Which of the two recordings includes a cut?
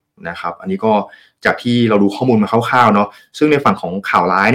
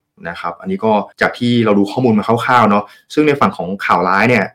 second; 1 cut; at 1.1 s

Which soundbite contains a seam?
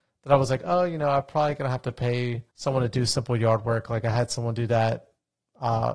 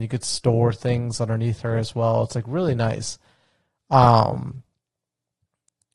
first; 1 cut; at 2.5 s

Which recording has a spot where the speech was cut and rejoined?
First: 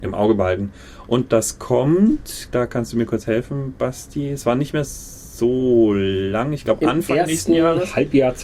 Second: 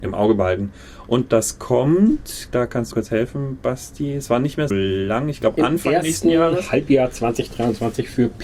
second; 2 cuts; at 2.9 s, 4.7 s

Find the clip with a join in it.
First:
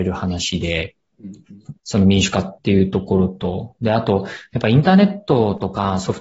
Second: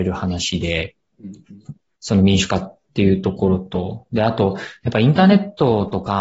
first; 2 cuts; at 1.8 s, 2.6 s

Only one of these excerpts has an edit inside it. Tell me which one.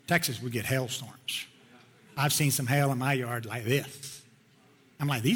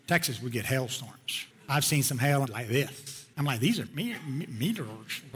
second; 4 cuts; at 1.5 s, 2.5 s, 3.3 s, 3.9 s

